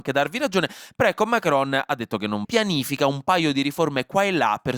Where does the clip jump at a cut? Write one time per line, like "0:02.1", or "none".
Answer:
0:02.4